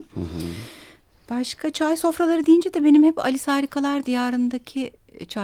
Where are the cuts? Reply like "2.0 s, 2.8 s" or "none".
none